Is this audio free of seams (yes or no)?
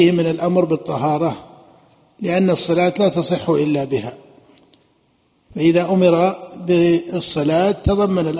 yes